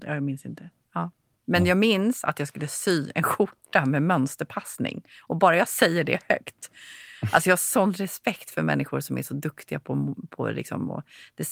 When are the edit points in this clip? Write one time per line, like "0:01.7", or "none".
none